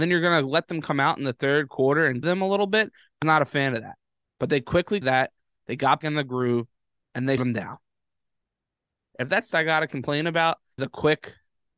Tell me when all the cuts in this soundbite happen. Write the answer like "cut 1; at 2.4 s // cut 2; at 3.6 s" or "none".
cut 1; at 2.2 s // cut 2; at 3.2 s // cut 3; at 5.0 s // cut 4; at 6.0 s // cut 5; at 7.4 s // cut 6; at 9.5 s // cut 7; at 10.8 s